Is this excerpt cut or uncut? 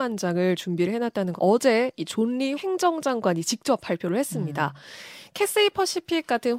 cut